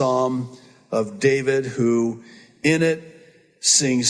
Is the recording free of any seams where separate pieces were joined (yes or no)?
yes